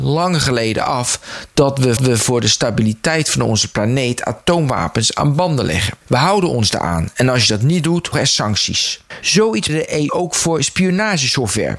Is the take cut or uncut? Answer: cut